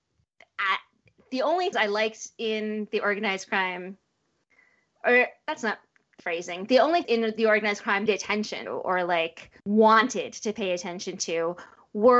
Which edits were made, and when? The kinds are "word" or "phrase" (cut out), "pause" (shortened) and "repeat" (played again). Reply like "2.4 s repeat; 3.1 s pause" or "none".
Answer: 1.7 s word; 6.2 s word; 7.0 s word; 8.1 s phrase; 8.7 s word; 9.6 s pause